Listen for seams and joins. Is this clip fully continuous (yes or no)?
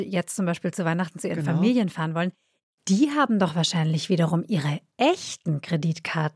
yes